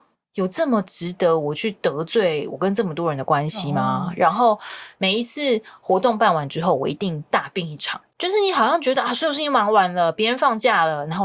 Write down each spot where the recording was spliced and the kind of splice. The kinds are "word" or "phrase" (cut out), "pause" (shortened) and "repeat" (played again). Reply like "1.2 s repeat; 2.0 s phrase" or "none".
8.1 s pause